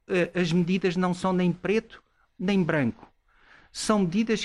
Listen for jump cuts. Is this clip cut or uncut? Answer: uncut